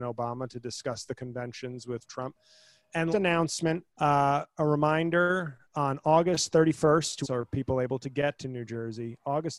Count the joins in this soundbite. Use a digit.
5